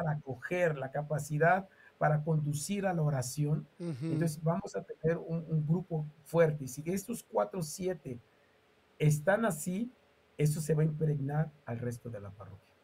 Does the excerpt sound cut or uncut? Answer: uncut